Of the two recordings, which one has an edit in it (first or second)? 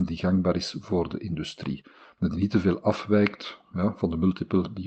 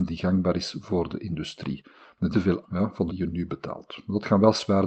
second